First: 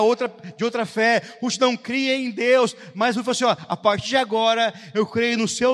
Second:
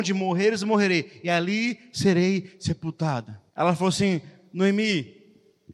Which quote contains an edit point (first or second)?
second